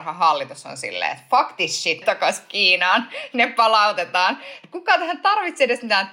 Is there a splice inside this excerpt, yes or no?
yes